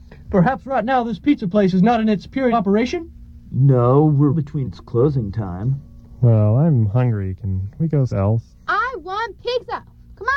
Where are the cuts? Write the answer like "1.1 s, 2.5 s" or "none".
2.5 s, 4.3 s, 4.6 s, 8.1 s, 8.5 s